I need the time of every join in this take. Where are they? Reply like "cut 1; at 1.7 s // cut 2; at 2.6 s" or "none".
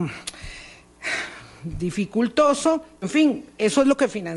cut 1; at 3.0 s